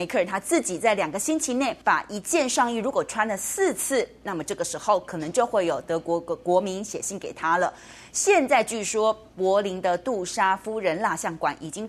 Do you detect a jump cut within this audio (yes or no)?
yes